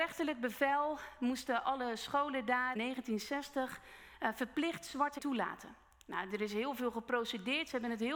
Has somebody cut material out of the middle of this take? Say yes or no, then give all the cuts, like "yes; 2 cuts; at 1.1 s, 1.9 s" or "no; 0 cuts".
yes; 2 cuts; at 2.8 s, 5.2 s